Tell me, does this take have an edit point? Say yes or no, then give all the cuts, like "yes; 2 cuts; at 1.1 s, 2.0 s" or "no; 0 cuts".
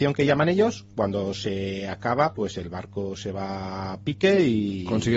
no; 0 cuts